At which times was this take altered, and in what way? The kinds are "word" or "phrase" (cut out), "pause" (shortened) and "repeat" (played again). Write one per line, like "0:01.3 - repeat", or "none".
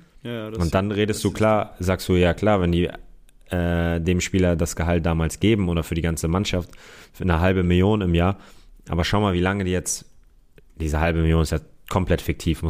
none